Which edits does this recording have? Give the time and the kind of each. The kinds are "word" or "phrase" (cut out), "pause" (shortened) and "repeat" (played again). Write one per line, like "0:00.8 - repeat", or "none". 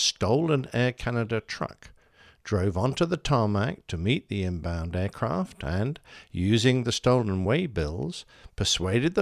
none